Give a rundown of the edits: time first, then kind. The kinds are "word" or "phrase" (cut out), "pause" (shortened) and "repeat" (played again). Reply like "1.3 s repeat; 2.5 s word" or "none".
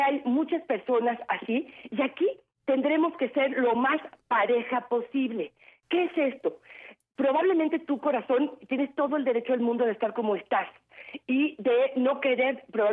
none